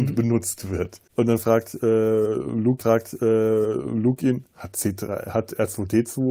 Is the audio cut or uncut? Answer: cut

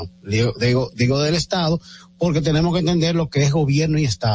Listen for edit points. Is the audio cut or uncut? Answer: uncut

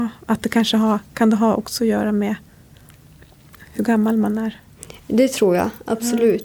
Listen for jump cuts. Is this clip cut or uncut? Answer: uncut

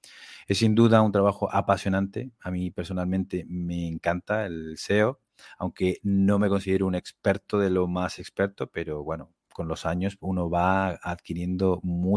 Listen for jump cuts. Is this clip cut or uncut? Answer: uncut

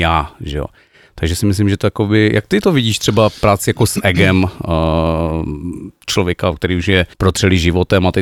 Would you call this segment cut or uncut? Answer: cut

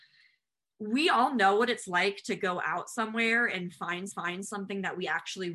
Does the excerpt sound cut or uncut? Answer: cut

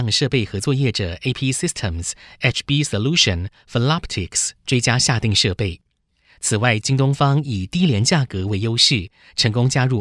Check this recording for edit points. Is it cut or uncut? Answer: uncut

